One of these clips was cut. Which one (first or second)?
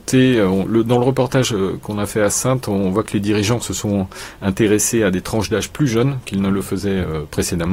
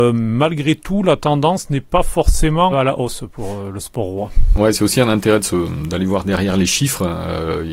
second